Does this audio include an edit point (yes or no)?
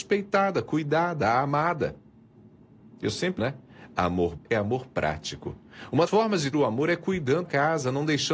yes